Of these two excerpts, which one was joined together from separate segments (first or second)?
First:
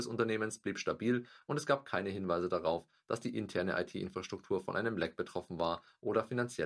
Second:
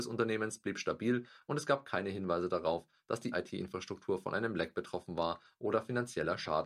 second